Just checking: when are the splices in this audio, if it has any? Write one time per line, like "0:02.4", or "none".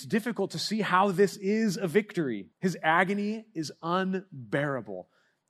0:02.5